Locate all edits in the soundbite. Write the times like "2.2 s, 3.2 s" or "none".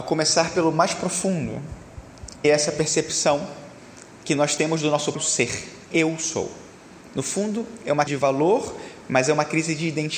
2.4 s, 5.1 s, 5.9 s, 8.1 s